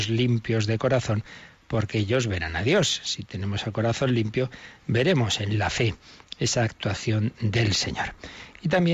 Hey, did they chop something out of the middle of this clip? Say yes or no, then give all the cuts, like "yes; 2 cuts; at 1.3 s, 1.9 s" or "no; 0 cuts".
no; 0 cuts